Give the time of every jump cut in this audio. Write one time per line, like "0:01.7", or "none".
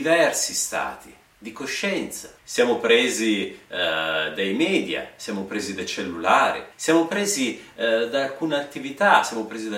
0:02.4
0:06.7